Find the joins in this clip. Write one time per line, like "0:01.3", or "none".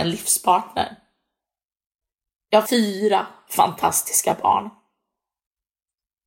0:02.0
0:02.7